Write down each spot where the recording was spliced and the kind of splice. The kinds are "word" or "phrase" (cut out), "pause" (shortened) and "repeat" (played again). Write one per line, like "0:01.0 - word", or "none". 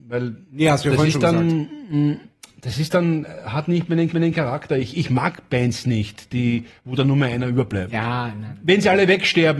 0:04.1 - repeat

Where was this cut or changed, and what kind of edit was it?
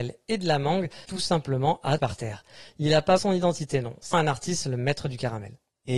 0:01.1 - word
0:02.0 - word
0:03.2 - word
0:04.1 - word

